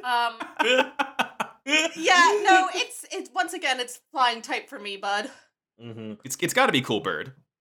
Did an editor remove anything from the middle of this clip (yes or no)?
no